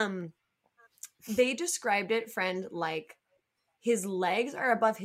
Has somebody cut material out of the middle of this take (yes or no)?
no